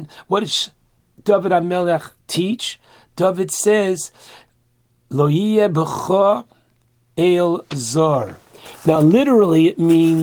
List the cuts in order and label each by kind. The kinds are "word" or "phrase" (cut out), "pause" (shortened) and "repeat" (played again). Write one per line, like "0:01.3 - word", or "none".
none

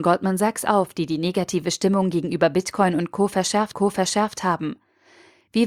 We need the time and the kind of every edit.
0:03.7 - repeat

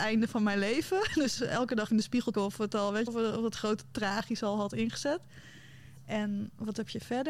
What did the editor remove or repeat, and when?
0:01.9 - word
0:02.3 - word
0:03.1 - word

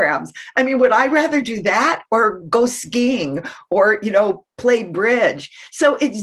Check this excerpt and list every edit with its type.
none

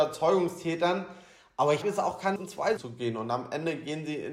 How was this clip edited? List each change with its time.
0:01.8 - word
0:02.4 - word
0:02.8 - word

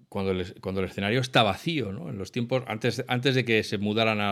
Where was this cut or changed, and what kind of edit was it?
none

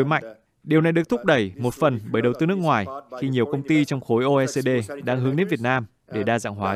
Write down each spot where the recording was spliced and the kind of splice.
none

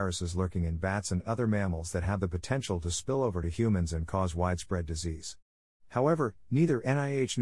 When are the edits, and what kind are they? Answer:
none

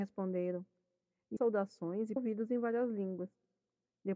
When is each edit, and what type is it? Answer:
0:01.4 - word
0:02.2 - phrase

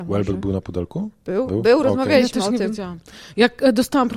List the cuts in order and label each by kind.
none

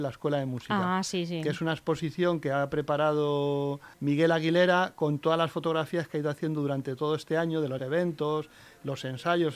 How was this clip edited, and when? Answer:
0:03.9 - pause
0:07.8 - word

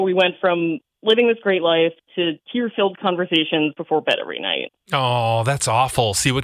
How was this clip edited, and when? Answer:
0:02.4 - pause

